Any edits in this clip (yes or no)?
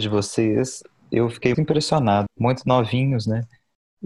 yes